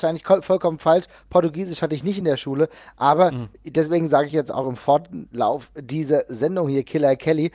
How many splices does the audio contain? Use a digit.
0